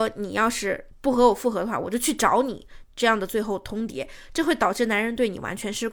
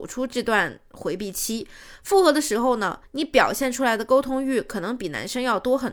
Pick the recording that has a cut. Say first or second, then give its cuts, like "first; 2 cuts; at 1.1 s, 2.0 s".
second; 1 cut; at 3.0 s